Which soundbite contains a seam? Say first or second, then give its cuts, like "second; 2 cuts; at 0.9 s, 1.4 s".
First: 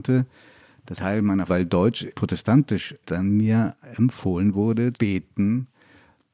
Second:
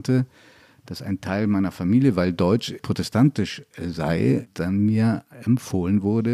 first; 4 cuts; at 1.0 s, 1.5 s, 3.0 s, 4.9 s